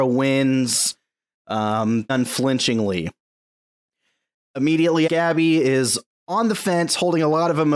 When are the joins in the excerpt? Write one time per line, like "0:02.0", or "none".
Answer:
0:02.1
0:05.1